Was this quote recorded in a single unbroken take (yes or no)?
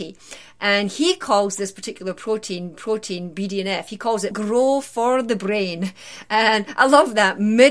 no